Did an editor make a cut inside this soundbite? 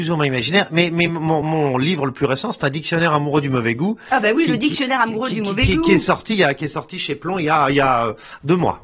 no; 0 cuts

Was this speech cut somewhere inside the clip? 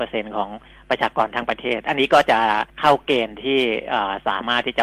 yes; 1 cut; at 2.7 s

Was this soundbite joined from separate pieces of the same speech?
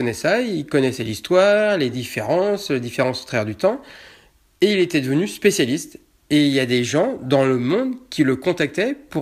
no; 0 cuts

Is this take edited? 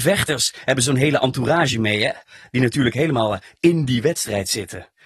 no; 0 cuts

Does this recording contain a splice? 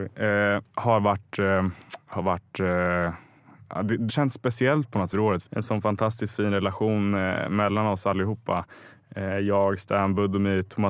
yes; 3 cuts; at 4.1 s, 5.1 s, 5.5 s

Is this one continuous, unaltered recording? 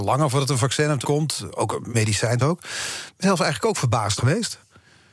no; 5 cuts; at 1.0 s, 1.9 s, 2.4 s, 3.2 s, 4.2 s

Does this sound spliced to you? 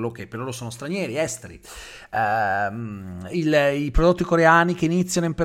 no; 0 cuts

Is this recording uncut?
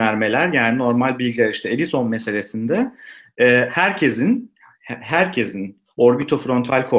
yes; 0 cuts

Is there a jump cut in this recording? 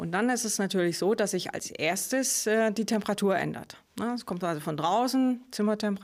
no; 0 cuts

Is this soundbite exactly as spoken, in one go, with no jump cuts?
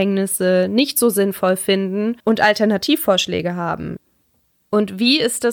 no; 1 cut; at 2.2 s

